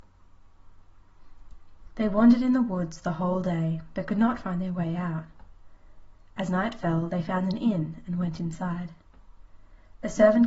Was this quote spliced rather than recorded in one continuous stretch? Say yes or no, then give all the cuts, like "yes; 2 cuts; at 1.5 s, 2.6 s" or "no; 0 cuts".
no; 0 cuts